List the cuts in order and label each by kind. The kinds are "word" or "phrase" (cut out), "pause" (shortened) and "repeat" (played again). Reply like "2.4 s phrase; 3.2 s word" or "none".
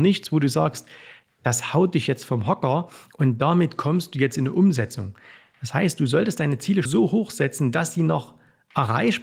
6.8 s word